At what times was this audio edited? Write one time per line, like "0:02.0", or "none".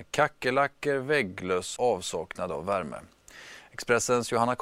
0:01.8